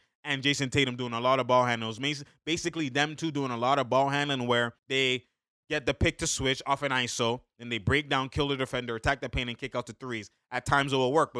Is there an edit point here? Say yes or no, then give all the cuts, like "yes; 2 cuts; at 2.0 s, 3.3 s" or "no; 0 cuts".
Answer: yes; 1 cut; at 4.8 s